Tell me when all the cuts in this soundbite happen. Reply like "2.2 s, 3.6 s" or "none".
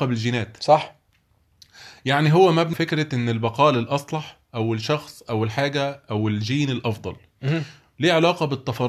2.7 s